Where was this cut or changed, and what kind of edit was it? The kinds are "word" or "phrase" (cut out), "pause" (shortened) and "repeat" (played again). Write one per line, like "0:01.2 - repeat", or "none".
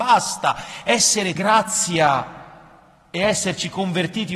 0:01.4 - phrase

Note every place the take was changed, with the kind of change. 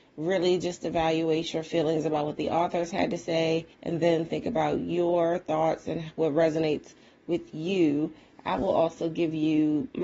0:03.7 - pause

